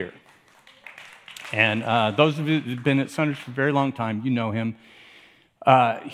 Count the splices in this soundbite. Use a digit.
0